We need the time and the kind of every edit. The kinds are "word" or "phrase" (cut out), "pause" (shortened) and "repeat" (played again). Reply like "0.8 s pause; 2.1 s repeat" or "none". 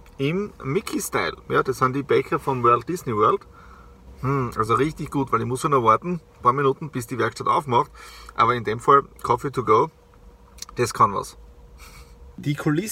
none